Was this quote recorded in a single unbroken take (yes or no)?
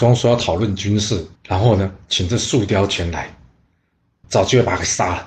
no